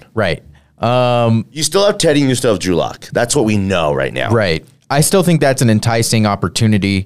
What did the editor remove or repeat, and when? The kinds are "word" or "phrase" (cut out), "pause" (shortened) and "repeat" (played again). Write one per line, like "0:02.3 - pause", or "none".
none